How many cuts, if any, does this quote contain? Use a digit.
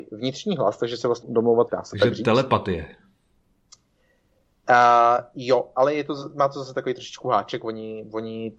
2